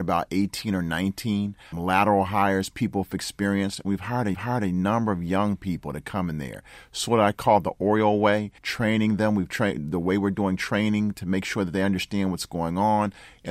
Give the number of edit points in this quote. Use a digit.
3